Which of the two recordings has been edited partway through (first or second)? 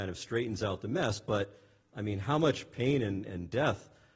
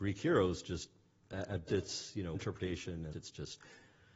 second